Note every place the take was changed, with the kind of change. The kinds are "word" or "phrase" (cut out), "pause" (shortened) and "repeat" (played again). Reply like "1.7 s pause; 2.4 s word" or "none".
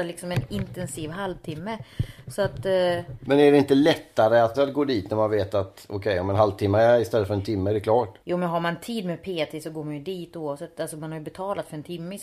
4.5 s word; 8.2 s pause